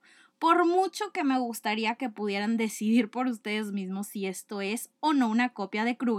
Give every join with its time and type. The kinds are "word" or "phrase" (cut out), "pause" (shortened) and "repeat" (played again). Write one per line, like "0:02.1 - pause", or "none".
none